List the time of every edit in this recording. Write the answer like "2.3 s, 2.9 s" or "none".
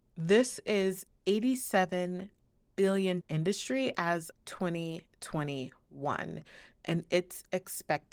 1.1 s, 3.2 s, 4.3 s